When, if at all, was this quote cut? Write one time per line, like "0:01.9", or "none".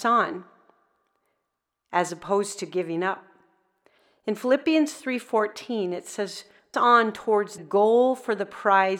0:06.7
0:07.6